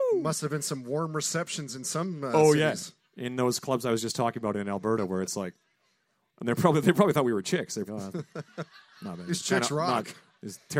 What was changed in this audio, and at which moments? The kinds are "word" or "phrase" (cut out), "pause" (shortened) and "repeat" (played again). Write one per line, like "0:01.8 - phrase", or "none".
0:07.9 - word